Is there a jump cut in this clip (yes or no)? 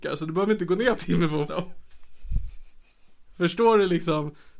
yes